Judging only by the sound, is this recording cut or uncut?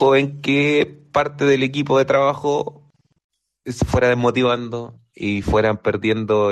uncut